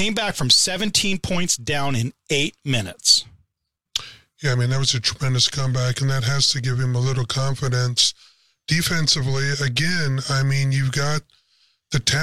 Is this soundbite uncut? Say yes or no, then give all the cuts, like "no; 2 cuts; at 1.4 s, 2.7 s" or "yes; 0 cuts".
yes; 0 cuts